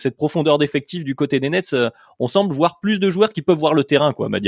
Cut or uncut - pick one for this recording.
uncut